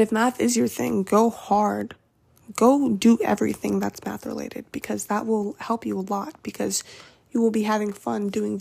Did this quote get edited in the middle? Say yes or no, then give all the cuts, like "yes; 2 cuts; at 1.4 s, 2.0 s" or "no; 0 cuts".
no; 0 cuts